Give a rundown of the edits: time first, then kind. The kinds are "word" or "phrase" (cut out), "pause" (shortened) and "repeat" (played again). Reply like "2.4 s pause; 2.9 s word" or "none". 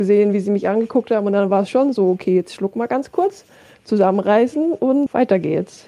none